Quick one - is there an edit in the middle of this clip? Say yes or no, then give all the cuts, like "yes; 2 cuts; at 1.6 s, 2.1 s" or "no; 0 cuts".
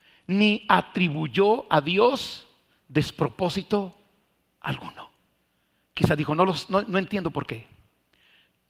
no; 0 cuts